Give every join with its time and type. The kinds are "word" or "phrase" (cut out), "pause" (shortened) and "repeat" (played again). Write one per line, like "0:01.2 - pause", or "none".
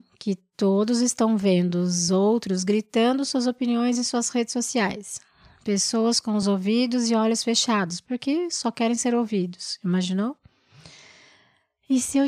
none